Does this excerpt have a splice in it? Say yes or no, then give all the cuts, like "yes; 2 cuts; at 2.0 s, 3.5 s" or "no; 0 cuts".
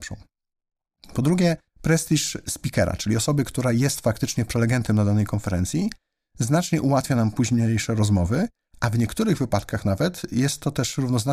no; 0 cuts